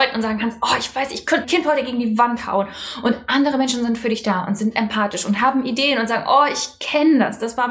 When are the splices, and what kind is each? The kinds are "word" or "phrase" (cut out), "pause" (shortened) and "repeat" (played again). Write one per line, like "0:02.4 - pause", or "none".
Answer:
0:01.4 - word